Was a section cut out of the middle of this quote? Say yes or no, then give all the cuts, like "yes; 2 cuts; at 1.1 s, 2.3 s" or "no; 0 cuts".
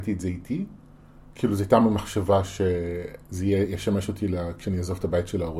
no; 0 cuts